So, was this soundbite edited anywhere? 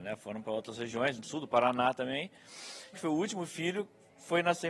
yes; 2 cuts; at 1.2 s, 2.9 s

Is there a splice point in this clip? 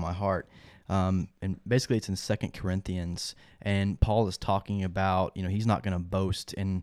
no; 0 cuts

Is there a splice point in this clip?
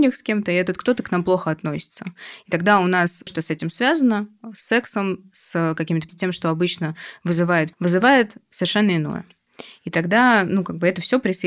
yes; 3 cuts; at 3.3 s, 6.1 s, 7.7 s

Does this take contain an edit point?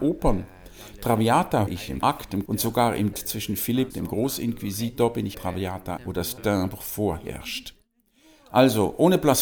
yes; 8 cuts; at 1.7 s, 2.0 s, 2.5 s, 3.1 s, 3.9 s, 5.3 s, 6.0 s, 6.4 s

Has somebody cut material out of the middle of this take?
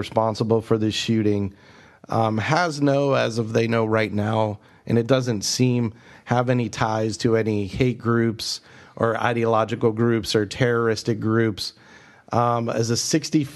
no; 0 cuts

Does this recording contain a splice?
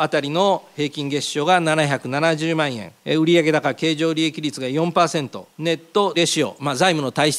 yes; 3 cuts; at 3.0 s, 5.5 s, 6.1 s

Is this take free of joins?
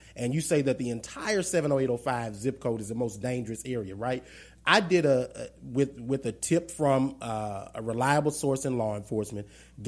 yes; 0 cuts

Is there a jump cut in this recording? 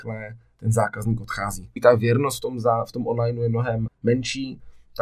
yes; 2 cuts; at 1.8 s, 3.9 s

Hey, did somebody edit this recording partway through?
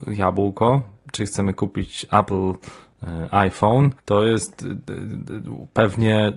yes; 1 cut; at 4.0 s

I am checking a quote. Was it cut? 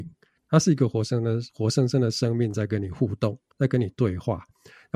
yes; 2 cuts; at 1.5 s, 3.5 s

